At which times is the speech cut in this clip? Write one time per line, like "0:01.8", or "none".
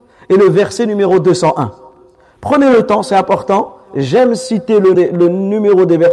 0:04.9